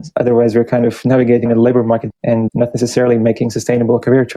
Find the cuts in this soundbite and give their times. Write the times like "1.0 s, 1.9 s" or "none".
1.5 s, 2.1 s, 2.5 s